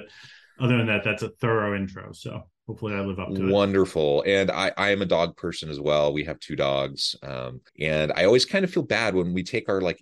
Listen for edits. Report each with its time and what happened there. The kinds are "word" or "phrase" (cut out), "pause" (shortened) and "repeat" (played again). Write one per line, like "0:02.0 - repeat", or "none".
0:07.7 - pause